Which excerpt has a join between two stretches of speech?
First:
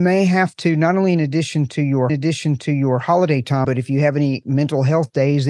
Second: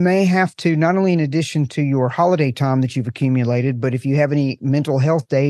first; 2 cuts; at 2.1 s, 3.6 s

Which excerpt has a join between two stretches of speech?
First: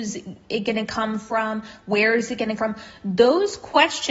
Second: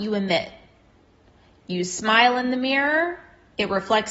first; 1 cut; at 2.6 s

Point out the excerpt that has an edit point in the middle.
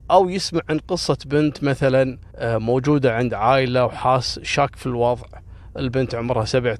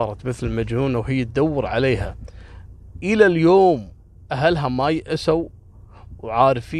first; 1 cut; at 2.3 s

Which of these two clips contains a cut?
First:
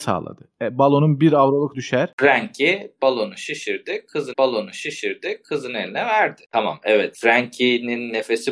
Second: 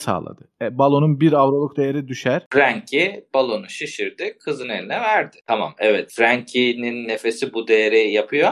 first; 2 cuts; at 1.7 s, 4.3 s

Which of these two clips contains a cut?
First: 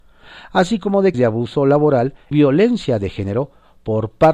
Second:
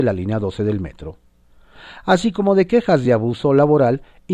first; 2 cuts; at 1.1 s, 2.3 s

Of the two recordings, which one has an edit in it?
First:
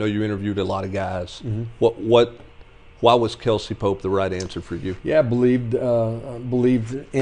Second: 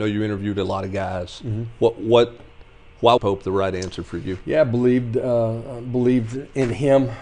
second; 1 cut; at 3.2 s

